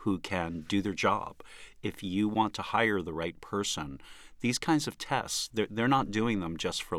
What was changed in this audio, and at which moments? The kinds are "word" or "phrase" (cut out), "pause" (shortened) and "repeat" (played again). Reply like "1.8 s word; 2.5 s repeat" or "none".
none